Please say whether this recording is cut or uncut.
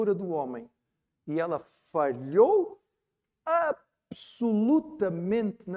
uncut